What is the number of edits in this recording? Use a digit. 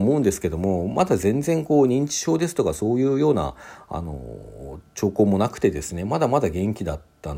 1